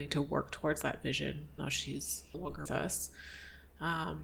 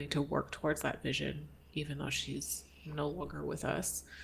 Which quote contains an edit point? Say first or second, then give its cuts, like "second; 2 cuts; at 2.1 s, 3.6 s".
first; 3 cuts; at 1.6 s, 2.3 s, 2.7 s